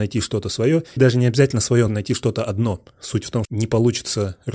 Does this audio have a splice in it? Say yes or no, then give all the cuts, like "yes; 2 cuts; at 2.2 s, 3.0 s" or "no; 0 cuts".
yes; 3 cuts; at 1.0 s, 1.9 s, 3.4 s